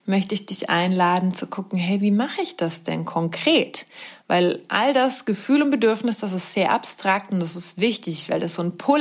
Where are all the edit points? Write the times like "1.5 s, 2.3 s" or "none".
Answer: none

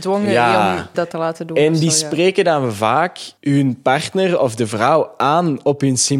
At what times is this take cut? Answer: 0.9 s, 3.4 s

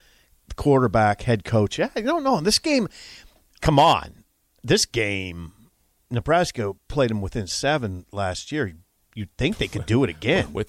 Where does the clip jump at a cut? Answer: 3.6 s

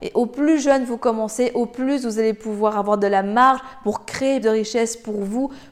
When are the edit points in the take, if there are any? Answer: 4.4 s

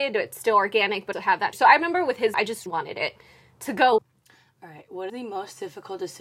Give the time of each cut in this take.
1.1 s, 1.5 s, 2.3 s, 2.7 s, 4.0 s, 5.1 s

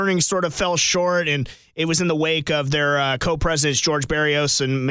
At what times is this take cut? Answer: none

